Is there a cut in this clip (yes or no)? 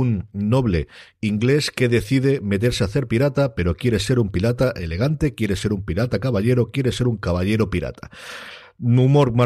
no